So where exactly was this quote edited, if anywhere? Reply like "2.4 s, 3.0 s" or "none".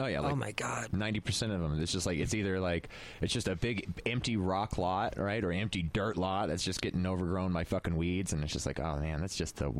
none